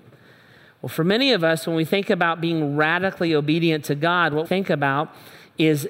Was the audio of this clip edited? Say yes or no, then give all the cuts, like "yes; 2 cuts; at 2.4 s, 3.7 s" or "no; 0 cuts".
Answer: yes; 1 cut; at 4.4 s